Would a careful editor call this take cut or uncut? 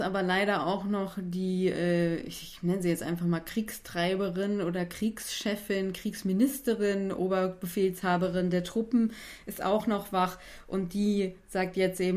uncut